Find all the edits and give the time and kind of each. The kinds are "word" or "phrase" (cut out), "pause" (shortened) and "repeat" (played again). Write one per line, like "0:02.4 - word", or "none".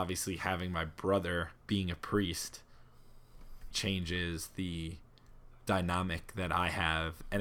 0:01.6 - pause
0:03.7 - word